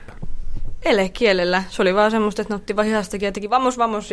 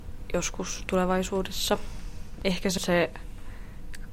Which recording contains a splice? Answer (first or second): second